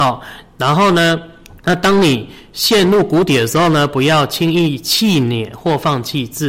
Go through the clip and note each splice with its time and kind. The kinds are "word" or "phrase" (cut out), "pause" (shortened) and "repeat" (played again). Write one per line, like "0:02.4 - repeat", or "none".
0:01.6 - pause